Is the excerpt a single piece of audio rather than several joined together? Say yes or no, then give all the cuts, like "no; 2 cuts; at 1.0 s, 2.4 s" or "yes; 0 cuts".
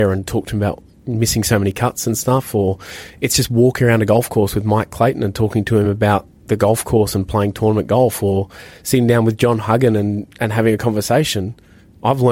yes; 0 cuts